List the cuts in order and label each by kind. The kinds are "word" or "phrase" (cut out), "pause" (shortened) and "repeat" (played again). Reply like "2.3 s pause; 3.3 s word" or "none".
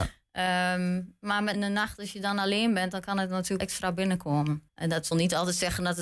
1.5 s word; 3.6 s word; 4.7 s pause; 5.1 s word

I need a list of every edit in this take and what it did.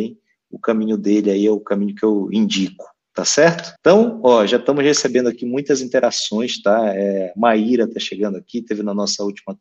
3.8 s pause

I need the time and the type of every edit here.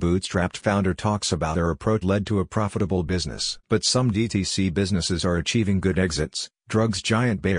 1.5 s word; 2.0 s word; 3.6 s pause

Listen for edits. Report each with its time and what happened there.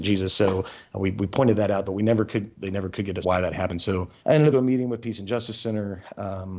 1.9 s phrase; 3.2 s phrase; 4.2 s pause; 4.5 s phrase

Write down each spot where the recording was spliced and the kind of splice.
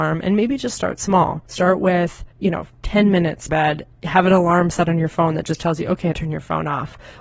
1.5 s pause; 2.3 s pause; 3.5 s word; 6.1 s phrase

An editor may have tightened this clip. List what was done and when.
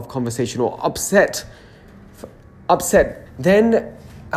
3.3 s word

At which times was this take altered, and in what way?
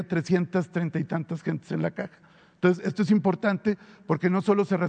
none

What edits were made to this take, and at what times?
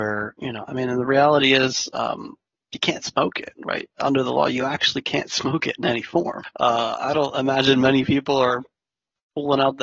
none

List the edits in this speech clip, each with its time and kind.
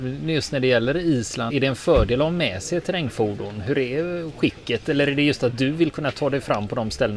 1.5 s word

